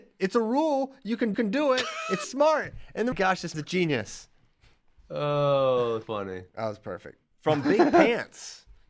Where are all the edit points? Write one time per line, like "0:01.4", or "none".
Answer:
0:01.3
0:02.2
0:03.1
0:03.5
0:06.0
0:07.3

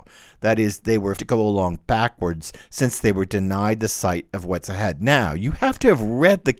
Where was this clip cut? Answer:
0:01.2

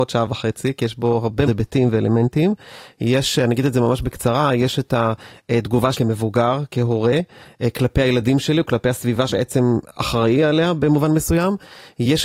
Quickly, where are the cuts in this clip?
0:01.5
0:05.9
0:09.3

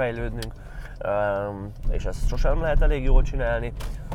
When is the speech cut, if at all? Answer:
0:01.8

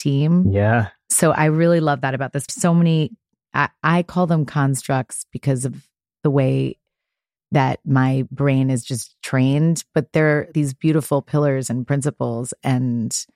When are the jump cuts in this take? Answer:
0:02.5
0:10.5

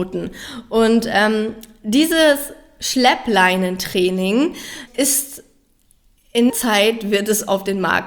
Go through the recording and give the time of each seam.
0:04.9
0:06.5

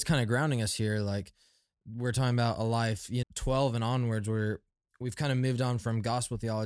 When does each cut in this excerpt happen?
0:03.2

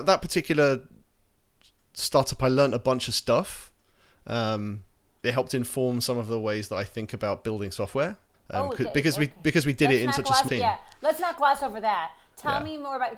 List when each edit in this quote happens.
0:05.1
0:08.3
0:10.5

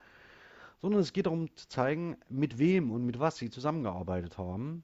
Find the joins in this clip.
none

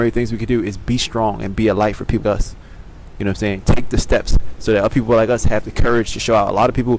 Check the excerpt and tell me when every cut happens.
0:02.2

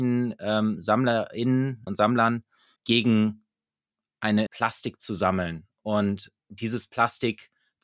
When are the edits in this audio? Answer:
0:01.9
0:02.8
0:04.5
0:06.4

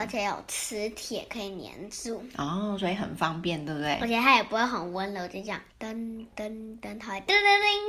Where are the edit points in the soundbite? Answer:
0:05.7

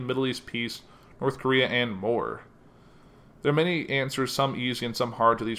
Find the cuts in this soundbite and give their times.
none

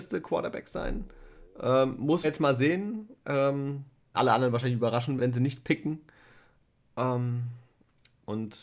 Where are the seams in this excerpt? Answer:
0:02.2
0:04.1
0:05.2

